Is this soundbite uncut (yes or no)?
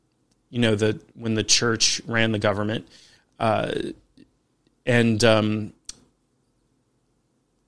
yes